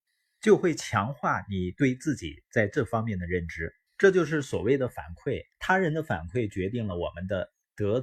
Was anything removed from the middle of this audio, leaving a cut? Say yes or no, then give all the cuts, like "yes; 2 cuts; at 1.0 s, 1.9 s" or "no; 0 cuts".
yes; 2 cuts; at 3.9 s, 5.5 s